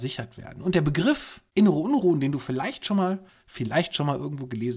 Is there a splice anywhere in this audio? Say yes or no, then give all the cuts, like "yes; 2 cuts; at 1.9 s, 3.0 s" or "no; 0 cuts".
no; 0 cuts